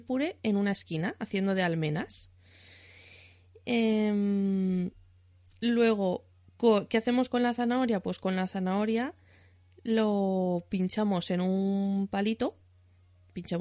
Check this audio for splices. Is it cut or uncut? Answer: uncut